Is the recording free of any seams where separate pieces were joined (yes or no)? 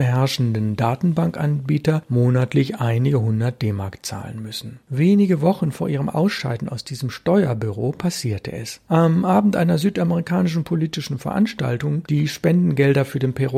no